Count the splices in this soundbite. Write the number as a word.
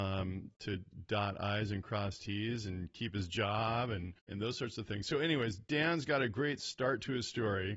one